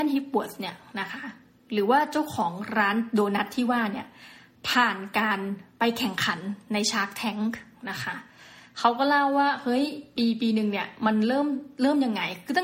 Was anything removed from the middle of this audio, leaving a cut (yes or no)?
no